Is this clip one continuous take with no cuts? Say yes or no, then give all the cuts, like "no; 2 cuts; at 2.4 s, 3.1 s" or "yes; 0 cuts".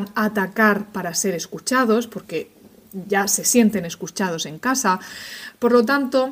yes; 0 cuts